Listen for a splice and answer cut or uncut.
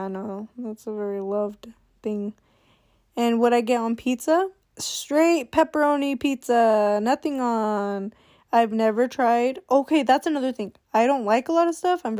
cut